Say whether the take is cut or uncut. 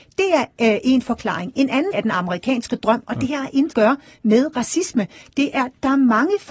cut